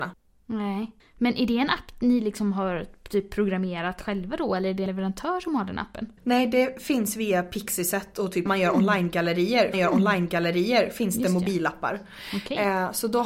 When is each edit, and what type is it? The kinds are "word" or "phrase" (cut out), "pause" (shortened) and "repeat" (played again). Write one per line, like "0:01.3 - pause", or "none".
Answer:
0:01.0 - pause
0:04.9 - word
0:06.2 - pause
0:08.5 - phrase
0:09.7 - repeat